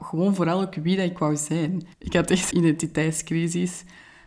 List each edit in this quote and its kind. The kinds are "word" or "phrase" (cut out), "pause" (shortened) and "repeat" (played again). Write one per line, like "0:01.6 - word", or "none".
0:01.9 - pause
0:02.5 - phrase